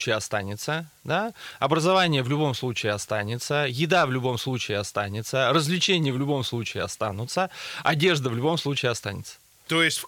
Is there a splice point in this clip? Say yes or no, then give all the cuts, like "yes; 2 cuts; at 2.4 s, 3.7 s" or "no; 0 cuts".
no; 0 cuts